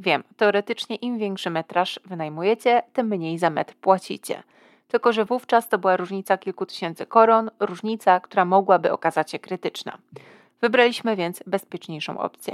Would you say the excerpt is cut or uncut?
uncut